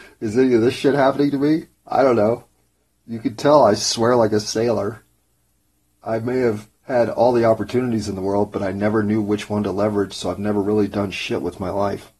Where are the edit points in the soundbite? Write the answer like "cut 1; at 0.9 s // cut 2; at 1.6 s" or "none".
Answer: cut 1; at 6.8 s

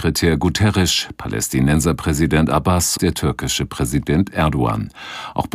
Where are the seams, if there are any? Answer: cut 1; at 3.0 s

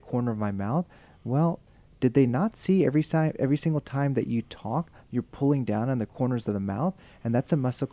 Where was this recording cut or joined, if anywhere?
none

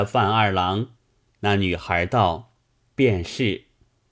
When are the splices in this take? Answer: cut 1; at 1.0 s // cut 2; at 2.6 s

